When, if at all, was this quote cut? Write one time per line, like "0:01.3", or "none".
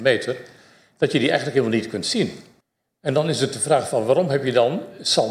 none

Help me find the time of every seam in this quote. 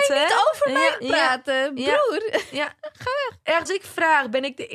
0:01.0
0:03.7

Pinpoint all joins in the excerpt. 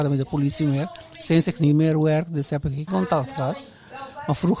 0:02.9

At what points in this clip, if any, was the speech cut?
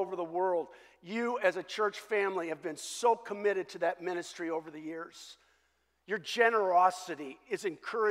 none

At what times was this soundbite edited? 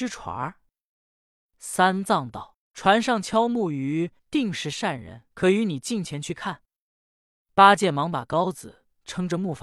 0:04.2
0:05.3

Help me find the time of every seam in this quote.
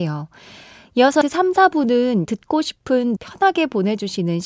0:01.2
0:02.3
0:03.2

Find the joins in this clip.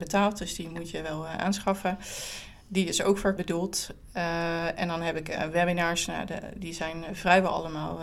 0:03.4

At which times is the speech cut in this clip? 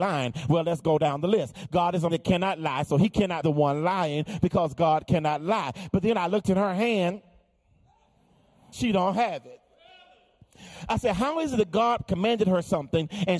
0:02.1
0:03.4
0:08.7

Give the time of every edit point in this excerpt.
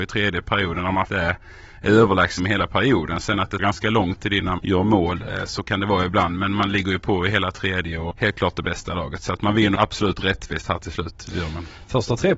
0:01.1
0:02.4
0:03.6
0:04.6
0:08.1
0:09.8

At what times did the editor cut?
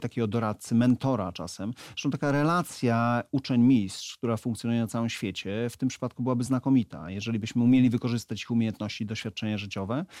none

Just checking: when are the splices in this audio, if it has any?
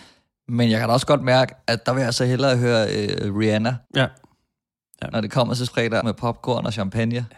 0:03.8
0:05.7
0:06.0

